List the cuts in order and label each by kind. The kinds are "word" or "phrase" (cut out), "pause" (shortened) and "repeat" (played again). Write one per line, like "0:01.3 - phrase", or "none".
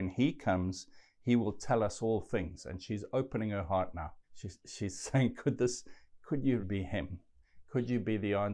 0:04.2 - pause
0:06.6 - word